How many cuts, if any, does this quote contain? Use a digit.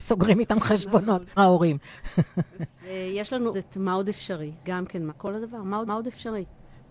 5